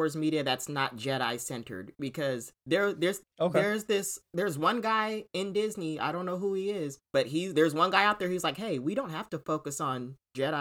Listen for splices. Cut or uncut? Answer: cut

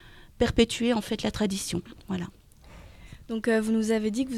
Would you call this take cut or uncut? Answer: cut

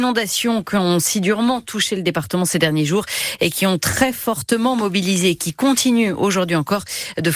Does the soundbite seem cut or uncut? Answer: uncut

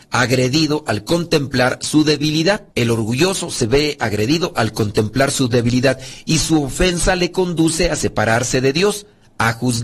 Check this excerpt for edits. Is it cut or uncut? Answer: cut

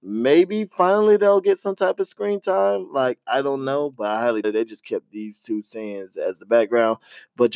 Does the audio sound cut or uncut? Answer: cut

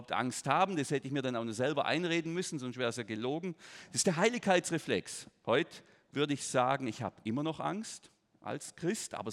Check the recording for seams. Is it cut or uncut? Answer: uncut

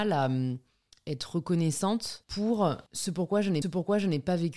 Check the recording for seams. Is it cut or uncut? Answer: cut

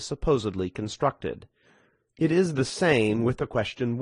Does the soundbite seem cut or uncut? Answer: uncut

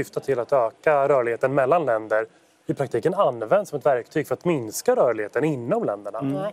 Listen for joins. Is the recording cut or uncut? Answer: uncut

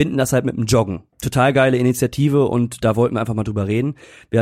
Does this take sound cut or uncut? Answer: cut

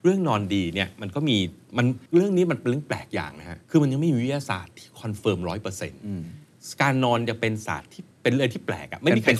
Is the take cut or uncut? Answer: cut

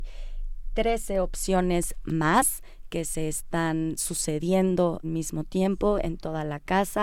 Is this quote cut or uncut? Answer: cut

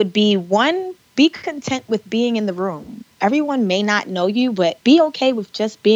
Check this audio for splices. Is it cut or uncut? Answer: cut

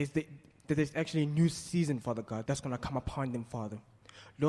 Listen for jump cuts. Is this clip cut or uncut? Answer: cut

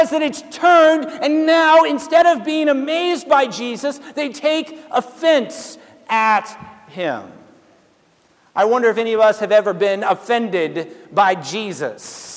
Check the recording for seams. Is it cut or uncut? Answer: uncut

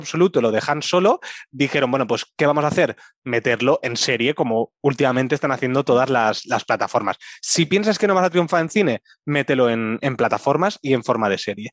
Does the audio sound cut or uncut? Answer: uncut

